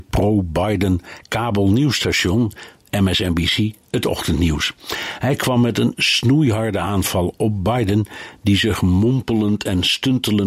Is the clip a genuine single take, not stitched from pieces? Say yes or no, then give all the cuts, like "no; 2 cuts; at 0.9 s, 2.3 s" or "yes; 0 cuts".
yes; 0 cuts